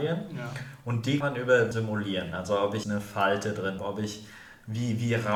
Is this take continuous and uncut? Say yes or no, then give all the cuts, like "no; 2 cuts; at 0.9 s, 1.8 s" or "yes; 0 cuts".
no; 4 cuts; at 1.2 s, 1.7 s, 2.8 s, 3.8 s